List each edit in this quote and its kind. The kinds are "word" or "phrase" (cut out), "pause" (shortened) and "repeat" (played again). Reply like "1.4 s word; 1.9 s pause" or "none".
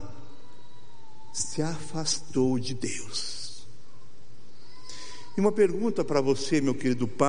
none